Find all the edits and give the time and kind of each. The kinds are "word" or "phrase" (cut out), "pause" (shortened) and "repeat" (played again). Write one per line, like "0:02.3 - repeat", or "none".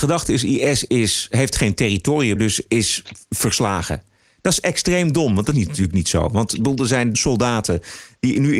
0:02.4 - word
0:05.5 - word
0:07.1 - word